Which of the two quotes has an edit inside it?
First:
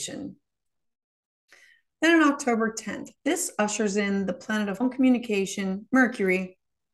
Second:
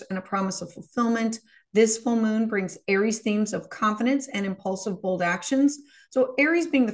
first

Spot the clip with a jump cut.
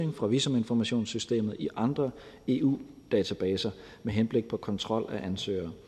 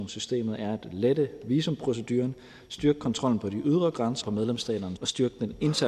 second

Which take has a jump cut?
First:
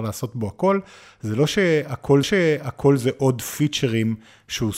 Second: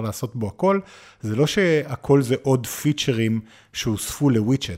first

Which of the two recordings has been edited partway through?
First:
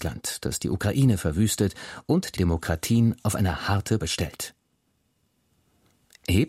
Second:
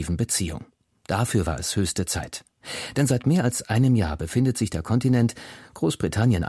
first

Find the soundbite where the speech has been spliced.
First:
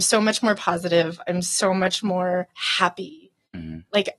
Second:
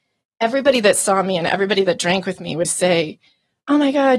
second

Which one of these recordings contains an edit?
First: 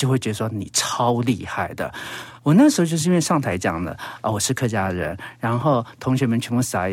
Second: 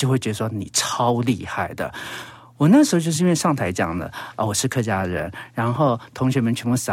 first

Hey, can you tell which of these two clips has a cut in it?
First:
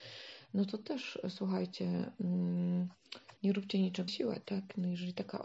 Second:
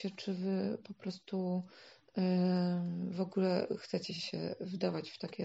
first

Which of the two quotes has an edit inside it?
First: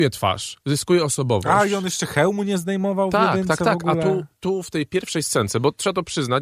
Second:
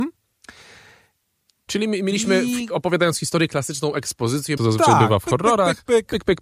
second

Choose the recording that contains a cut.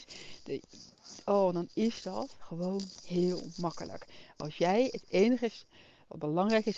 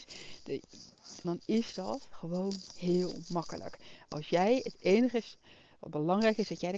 second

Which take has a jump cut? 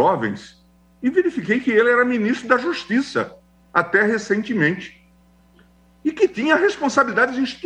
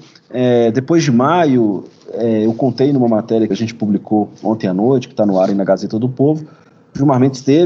second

